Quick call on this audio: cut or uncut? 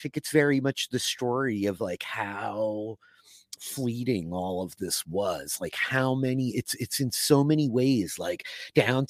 uncut